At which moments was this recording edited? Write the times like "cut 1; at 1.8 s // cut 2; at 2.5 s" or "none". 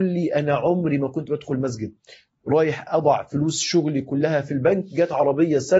none